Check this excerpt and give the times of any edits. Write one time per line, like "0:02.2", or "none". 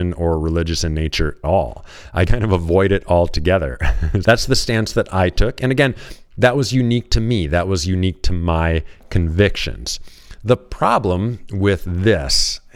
0:01.4
0:02.3
0:04.2
0:06.3